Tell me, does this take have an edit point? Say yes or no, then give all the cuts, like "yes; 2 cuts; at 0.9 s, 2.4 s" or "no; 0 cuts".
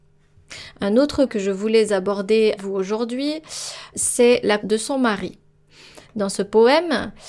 yes; 4 cuts; at 1.3 s, 2.6 s, 3.9 s, 4.6 s